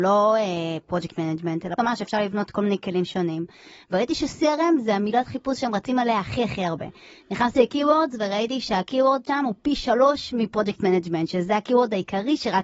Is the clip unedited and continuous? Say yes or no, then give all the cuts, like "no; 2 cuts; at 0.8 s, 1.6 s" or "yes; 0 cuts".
no; 1 cut; at 1.8 s